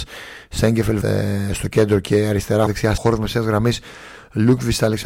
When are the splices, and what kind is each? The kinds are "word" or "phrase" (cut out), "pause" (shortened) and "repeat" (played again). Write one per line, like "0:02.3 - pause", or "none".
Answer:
0:01.0 - word
0:02.7 - word
0:03.0 - phrase